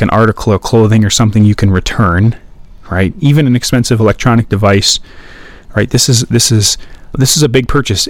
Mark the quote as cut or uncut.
cut